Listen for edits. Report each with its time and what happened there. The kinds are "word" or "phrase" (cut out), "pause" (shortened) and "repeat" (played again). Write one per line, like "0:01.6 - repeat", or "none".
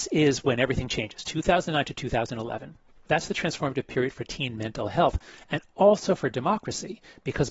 none